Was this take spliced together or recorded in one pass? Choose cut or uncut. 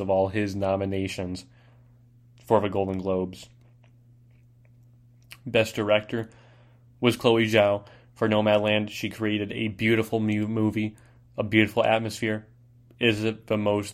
uncut